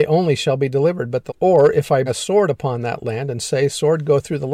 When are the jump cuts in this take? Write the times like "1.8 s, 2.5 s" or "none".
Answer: 1.3 s, 2.1 s